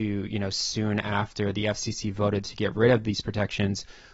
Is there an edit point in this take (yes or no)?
no